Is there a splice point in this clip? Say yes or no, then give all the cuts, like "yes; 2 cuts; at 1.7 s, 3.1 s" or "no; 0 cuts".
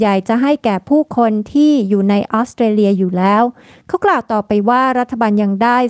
no; 0 cuts